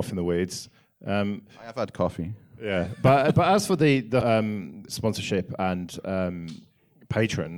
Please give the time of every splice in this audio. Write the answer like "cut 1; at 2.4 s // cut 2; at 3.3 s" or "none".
cut 1; at 4.2 s // cut 2; at 4.9 s